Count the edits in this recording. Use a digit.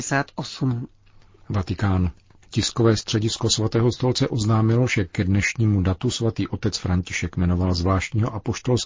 0